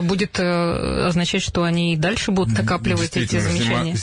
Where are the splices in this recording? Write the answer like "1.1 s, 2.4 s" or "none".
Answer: none